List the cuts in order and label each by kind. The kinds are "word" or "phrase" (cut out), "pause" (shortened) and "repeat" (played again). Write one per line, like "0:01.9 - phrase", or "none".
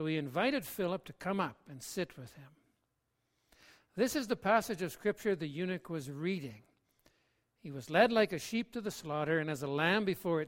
none

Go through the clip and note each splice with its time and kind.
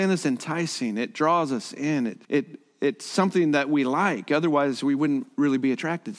0:02.2 - pause

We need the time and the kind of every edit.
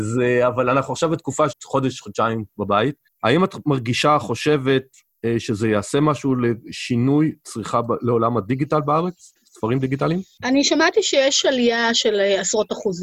0:01.5 - word
0:03.1 - pause
0:09.4 - pause

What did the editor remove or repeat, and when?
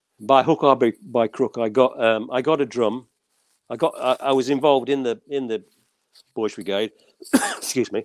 none

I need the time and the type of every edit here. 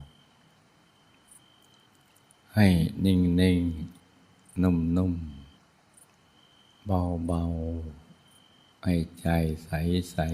0:04.0 - pause
0:05.5 - pause

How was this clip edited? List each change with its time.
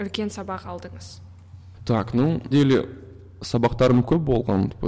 0:01.7 - pause
0:02.5 - phrase

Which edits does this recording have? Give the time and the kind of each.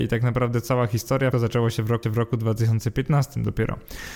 0:01.3 - word
0:02.0 - repeat

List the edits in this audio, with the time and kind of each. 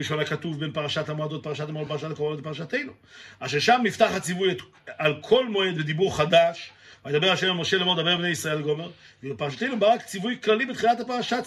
none

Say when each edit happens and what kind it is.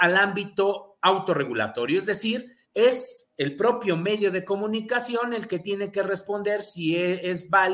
0:02.6 - pause

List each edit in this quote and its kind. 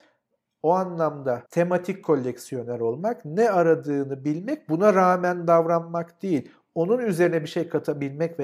0:01.5 - pause

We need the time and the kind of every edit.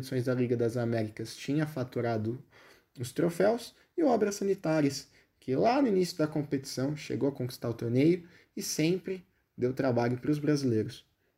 none

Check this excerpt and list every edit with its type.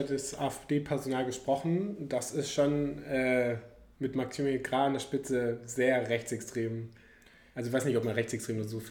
none

